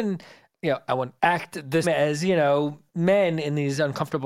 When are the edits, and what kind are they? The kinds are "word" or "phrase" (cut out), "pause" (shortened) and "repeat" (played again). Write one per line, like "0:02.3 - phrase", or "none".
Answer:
0:01.2 - pause
0:01.8 - word
0:02.9 - pause